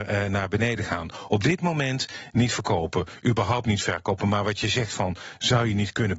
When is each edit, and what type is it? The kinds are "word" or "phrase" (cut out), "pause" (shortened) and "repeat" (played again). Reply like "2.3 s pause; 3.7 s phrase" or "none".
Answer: none

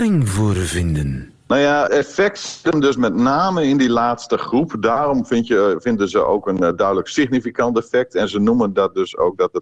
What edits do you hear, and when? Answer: 1.4 s pause; 1.9 s word

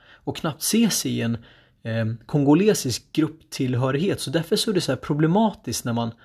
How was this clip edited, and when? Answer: none

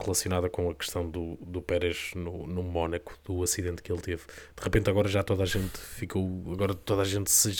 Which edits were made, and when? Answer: none

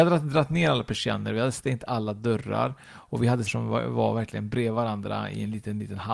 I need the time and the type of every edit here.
3.5 s phrase

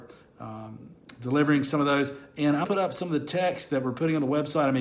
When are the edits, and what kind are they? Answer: 2.6 s word

